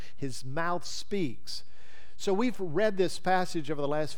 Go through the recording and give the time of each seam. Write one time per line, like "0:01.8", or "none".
none